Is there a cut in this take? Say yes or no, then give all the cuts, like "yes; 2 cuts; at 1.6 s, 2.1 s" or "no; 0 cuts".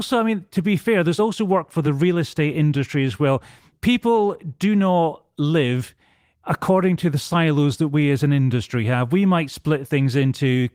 no; 0 cuts